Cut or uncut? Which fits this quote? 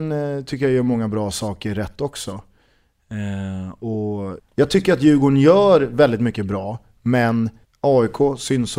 cut